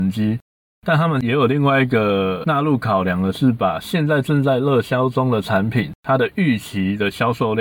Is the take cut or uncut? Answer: cut